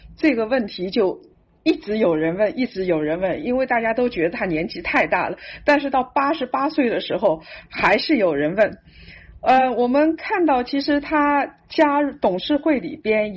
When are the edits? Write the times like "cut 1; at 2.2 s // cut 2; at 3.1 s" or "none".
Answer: none